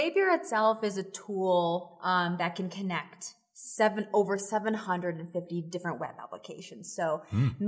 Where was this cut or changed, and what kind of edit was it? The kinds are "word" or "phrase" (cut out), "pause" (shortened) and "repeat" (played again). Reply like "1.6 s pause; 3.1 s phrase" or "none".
none